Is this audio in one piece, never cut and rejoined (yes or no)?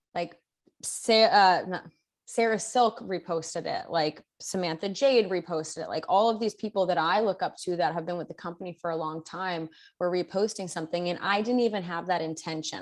yes